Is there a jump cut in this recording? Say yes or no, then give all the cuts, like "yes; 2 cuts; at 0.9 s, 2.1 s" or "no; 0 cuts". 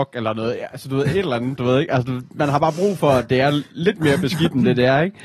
no; 0 cuts